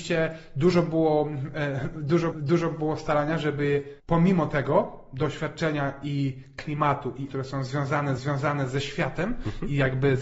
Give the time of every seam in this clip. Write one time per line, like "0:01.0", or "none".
0:02.3
0:04.0
0:07.3
0:08.2

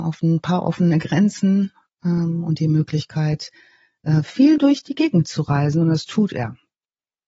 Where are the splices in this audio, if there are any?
none

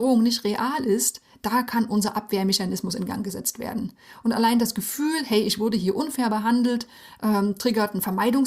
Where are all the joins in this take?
none

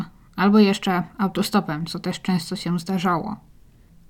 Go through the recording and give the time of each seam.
none

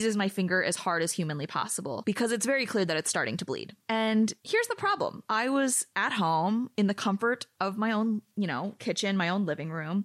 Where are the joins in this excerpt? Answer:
0:04.4

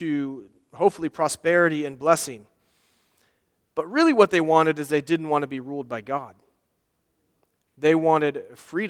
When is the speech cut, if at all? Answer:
none

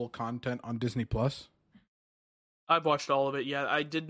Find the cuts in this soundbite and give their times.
none

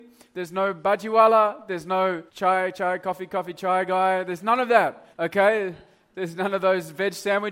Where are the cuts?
0:02.3
0:05.1

